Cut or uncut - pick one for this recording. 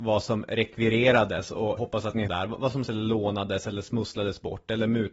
cut